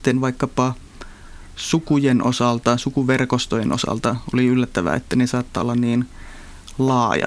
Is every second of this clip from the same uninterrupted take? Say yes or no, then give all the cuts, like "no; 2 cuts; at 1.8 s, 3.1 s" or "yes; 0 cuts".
yes; 0 cuts